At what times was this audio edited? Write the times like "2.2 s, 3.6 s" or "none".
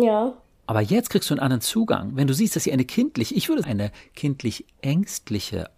3.6 s